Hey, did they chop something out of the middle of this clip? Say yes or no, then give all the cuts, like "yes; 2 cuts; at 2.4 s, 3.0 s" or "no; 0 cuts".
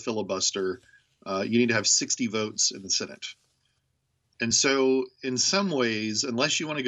no; 0 cuts